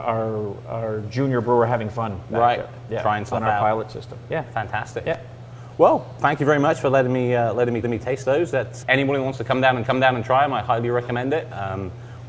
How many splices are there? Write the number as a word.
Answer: three